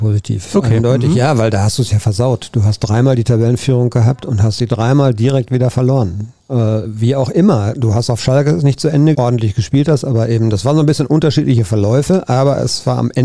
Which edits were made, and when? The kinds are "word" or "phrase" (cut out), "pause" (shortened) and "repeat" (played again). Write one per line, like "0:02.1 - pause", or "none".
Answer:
0:06.4 - pause
0:09.1 - phrase